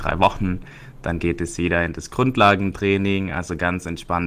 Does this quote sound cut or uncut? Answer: uncut